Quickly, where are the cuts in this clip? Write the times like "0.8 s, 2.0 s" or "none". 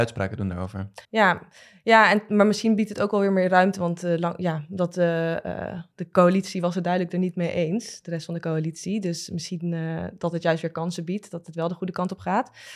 1.0 s